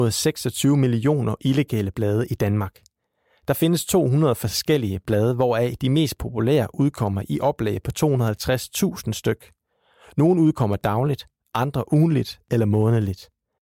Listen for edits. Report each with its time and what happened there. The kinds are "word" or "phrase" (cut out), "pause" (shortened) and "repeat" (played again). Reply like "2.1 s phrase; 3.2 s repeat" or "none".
none